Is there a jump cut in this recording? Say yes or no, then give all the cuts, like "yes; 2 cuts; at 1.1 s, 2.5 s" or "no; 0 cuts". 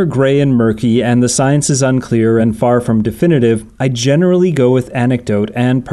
no; 0 cuts